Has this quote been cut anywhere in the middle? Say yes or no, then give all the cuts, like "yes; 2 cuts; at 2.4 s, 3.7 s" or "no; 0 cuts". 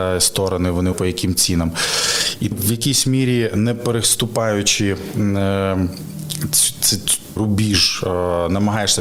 yes; 3 cuts; at 0.9 s, 2.5 s, 7.4 s